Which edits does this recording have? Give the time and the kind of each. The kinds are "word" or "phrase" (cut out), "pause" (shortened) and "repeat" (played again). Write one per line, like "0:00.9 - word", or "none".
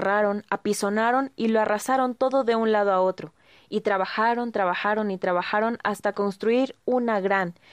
none